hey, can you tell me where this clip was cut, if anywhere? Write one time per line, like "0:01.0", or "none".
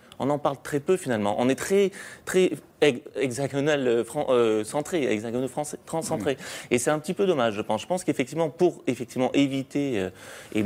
none